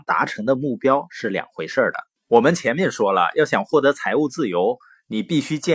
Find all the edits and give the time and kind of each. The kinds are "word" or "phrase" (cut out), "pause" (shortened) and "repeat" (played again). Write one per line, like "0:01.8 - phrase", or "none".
0:02.2 - pause